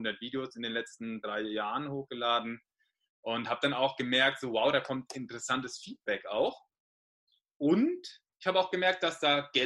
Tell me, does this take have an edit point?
no; 0 cuts

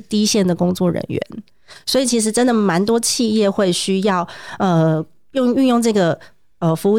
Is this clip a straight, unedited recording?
yes; 0 cuts

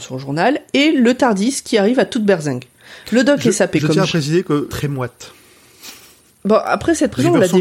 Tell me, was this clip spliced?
yes; 1 cut; at 4.7 s

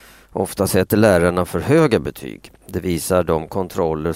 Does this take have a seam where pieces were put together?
yes; 1 cut; at 2.6 s

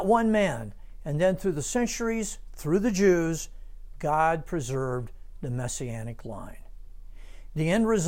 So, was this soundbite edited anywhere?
no; 0 cuts

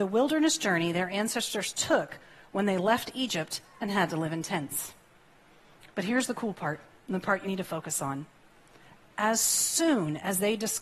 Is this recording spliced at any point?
yes; 1 cut; at 7.4 s

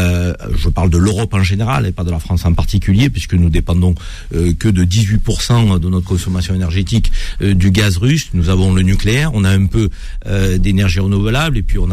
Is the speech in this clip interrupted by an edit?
no; 0 cuts

